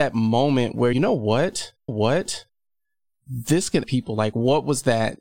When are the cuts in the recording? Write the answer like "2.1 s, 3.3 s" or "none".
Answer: 0.9 s, 1.9 s, 3.8 s